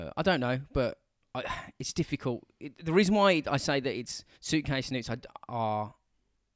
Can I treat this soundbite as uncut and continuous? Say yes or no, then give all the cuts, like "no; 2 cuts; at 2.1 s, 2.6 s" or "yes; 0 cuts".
no; 1 cut; at 4.3 s